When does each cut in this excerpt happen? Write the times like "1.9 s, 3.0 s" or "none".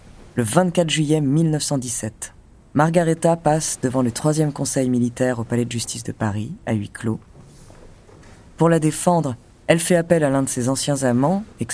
none